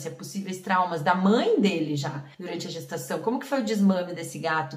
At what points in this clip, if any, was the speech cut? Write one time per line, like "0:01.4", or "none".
0:02.3

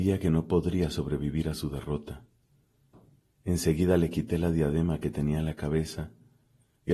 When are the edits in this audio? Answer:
none

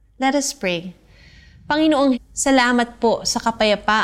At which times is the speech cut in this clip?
0:02.1

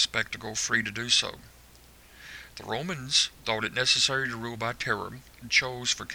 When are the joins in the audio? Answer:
none

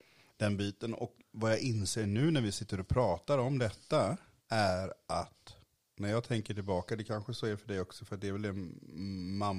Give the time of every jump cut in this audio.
0:04.4

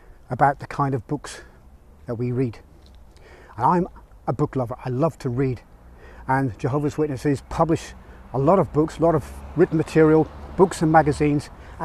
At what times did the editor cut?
none

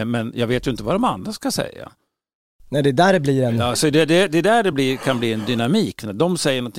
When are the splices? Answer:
none

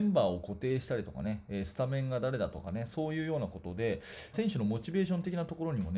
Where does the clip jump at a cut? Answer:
0:04.3

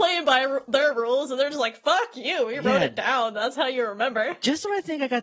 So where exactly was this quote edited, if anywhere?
none

